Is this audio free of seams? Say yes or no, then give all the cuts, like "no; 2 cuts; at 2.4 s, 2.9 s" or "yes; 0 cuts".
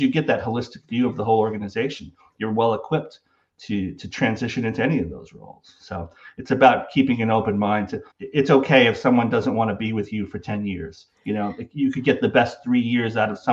no; 1 cut; at 8.1 s